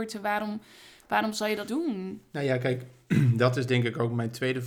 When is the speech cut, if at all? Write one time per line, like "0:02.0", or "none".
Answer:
0:01.7